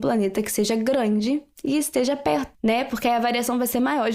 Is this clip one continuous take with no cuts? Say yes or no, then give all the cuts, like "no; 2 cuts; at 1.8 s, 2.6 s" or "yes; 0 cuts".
no; 1 cut; at 2.5 s